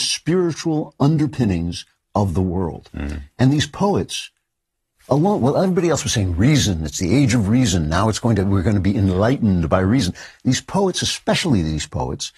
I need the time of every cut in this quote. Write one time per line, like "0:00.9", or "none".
none